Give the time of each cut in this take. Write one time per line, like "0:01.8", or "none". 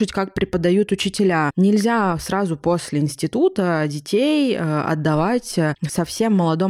none